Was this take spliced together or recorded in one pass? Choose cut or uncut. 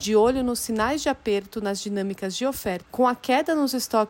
cut